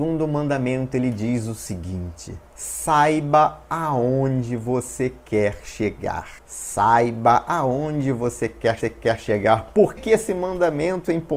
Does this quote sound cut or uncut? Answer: cut